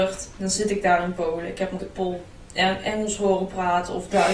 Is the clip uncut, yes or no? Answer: no